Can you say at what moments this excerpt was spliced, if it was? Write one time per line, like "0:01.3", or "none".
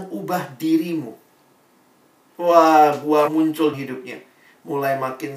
0:03.3
0:03.7

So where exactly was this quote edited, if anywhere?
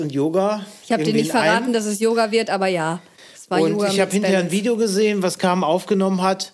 none

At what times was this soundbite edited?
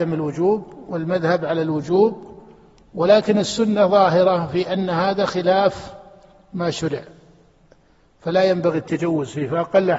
none

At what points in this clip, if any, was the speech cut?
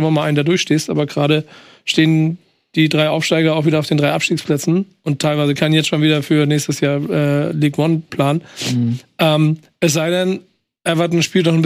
0:05.6
0:08.1

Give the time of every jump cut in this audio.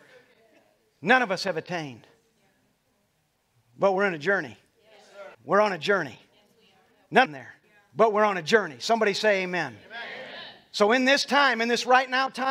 0:05.3
0:07.3
0:07.6

